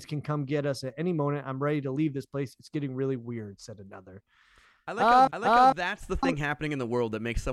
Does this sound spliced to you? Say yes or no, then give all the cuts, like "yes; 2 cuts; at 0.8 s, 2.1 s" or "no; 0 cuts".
yes; 1 cut; at 5.3 s